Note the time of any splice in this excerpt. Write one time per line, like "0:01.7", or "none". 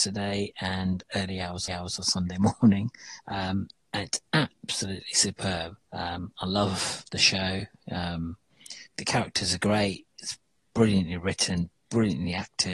0:01.7
0:03.2
0:05.8
0:08.9